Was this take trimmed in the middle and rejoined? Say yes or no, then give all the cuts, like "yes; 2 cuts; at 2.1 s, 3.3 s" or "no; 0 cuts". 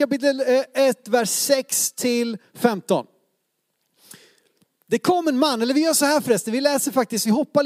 no; 0 cuts